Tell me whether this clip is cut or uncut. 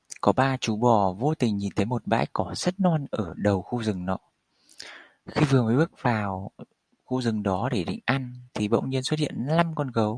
uncut